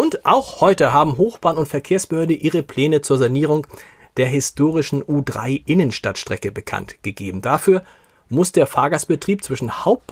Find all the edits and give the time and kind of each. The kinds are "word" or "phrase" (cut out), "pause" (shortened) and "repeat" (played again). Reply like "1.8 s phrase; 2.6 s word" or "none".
none